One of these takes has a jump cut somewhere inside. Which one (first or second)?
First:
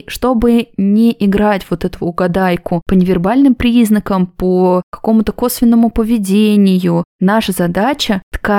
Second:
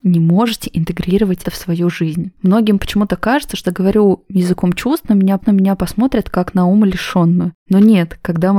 second